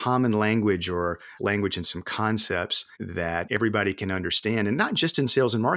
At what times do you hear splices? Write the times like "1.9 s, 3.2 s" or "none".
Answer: 2.9 s